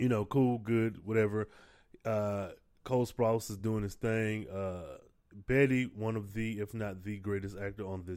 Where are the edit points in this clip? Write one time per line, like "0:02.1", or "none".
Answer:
none